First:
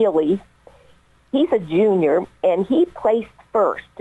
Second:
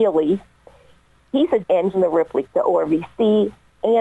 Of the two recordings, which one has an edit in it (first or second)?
second